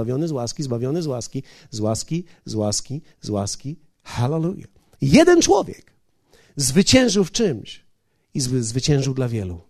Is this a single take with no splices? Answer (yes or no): yes